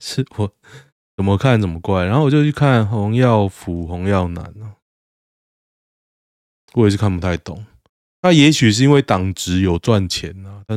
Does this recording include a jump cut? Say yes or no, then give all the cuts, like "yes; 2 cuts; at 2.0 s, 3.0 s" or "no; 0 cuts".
no; 0 cuts